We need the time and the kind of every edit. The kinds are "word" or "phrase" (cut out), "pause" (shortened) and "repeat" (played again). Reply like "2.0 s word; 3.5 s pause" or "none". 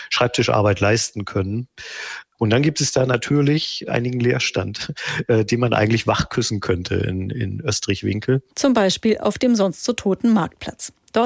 none